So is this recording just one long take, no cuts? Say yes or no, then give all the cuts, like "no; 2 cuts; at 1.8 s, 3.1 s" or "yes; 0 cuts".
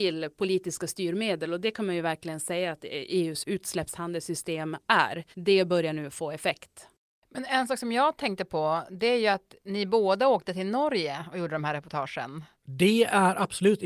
no; 3 cuts; at 5.3 s, 7.1 s, 12.5 s